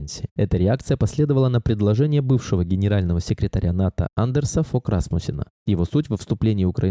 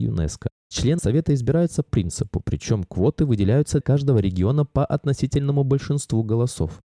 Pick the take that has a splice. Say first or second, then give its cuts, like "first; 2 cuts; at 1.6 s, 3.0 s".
second; 3 cuts; at 1.0 s, 1.9 s, 3.8 s